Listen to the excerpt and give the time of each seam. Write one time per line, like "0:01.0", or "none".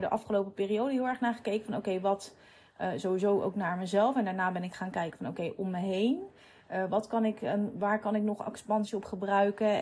none